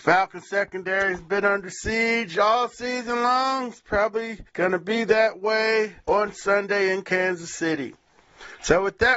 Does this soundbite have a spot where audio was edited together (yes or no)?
yes